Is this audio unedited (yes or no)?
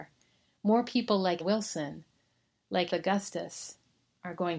no